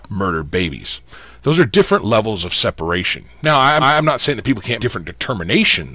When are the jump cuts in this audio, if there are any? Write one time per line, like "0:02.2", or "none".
0:03.8
0:04.8